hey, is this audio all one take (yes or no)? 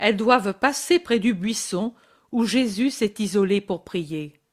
yes